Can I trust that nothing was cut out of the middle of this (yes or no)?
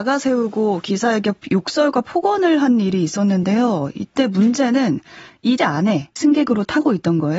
no